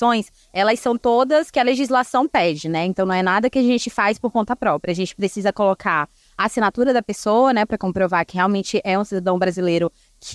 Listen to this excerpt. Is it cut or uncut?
uncut